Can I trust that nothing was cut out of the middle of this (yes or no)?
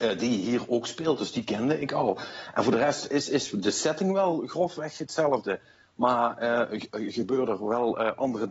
yes